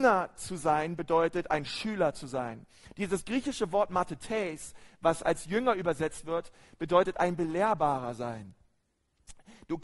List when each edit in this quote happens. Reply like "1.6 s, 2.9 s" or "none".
none